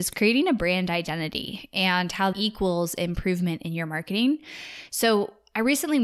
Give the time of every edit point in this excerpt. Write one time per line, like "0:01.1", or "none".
0:02.3